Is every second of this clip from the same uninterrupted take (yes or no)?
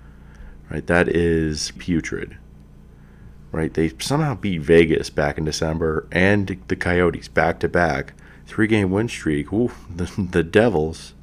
no